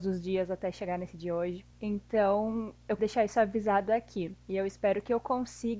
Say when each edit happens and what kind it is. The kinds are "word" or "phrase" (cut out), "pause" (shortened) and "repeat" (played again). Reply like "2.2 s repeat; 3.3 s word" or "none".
1.7 s pause; 3.0 s word; 4.4 s pause